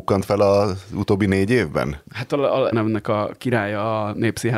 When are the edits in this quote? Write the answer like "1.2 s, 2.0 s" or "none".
2.1 s, 2.7 s